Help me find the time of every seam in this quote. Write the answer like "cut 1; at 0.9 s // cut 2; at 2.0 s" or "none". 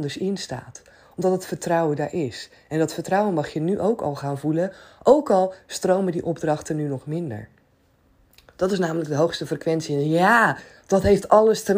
none